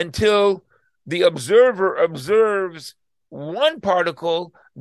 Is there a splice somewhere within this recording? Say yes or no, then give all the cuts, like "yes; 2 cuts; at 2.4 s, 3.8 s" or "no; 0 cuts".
no; 0 cuts